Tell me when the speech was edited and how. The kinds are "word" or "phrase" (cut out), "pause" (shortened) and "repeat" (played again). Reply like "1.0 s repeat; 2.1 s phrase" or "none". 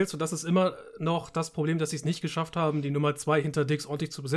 none